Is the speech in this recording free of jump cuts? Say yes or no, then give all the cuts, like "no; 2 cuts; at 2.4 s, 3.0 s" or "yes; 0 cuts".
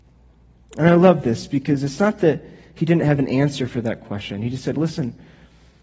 yes; 0 cuts